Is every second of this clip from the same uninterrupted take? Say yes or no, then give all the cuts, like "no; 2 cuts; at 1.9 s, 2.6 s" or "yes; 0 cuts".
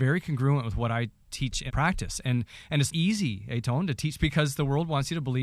no; 3 cuts; at 1.7 s, 2.9 s, 4.2 s